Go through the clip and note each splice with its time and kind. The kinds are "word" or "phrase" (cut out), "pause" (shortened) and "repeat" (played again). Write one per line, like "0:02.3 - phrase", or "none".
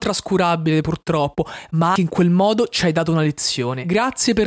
0:02.0 - word

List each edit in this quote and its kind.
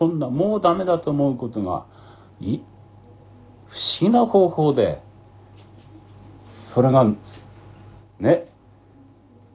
0:02.3 - pause

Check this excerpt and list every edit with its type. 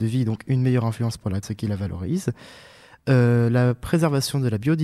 0:01.4 - word

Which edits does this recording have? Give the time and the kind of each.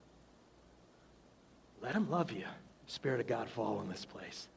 0:02.7 - pause

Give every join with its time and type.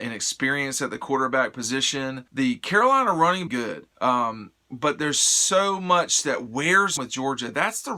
0:02.3 - pause
0:03.5 - phrase
0:03.9 - pause
0:07.0 - phrase

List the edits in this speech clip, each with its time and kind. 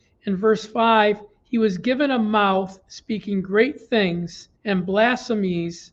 0:04.6 - pause

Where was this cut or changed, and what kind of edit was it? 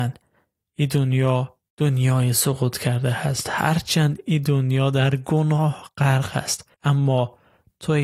0:01.7 - pause
0:06.7 - pause

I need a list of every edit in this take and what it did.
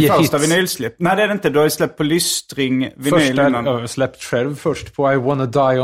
none

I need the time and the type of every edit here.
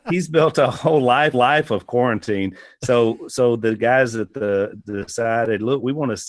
0:01.3 - repeat

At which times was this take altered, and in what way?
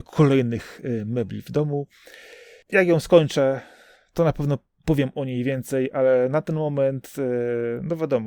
none

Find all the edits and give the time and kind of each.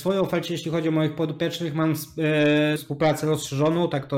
0:02.8 - word

